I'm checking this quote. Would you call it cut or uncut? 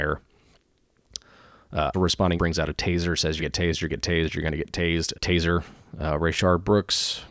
cut